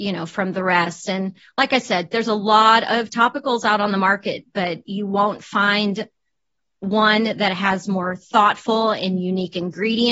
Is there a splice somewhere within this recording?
no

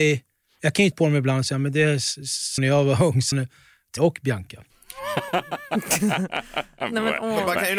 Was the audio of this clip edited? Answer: yes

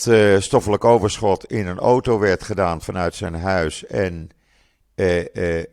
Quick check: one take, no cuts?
yes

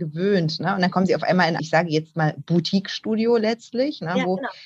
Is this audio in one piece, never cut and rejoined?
no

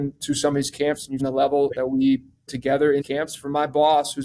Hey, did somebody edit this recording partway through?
yes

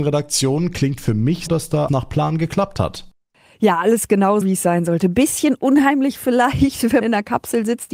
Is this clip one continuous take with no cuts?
no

